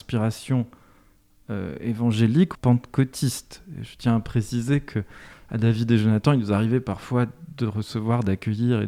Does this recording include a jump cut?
yes; 1 cut; at 2.5 s

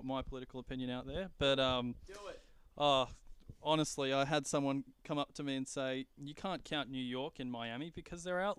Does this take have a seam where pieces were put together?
no; 0 cuts

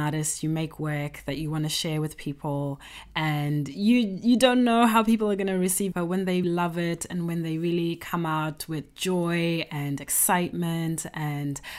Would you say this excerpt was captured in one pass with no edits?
no; 2 cuts; at 5.9 s, 6.4 s

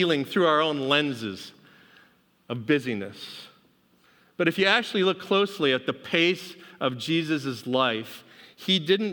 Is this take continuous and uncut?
yes; 0 cuts

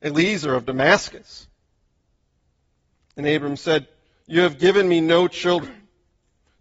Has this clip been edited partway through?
no; 0 cuts

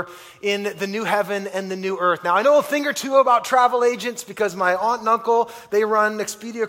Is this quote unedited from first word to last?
yes; 0 cuts

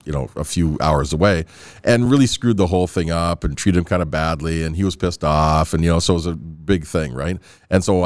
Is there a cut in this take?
no; 0 cuts

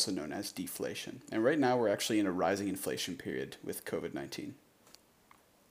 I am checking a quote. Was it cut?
no; 0 cuts

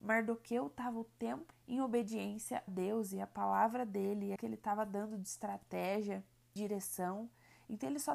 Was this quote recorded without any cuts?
no; 4 cuts; at 1.5 s, 2.7 s, 4.4 s, 6.6 s

